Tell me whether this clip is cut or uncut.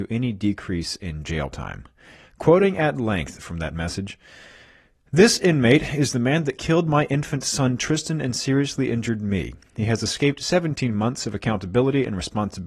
uncut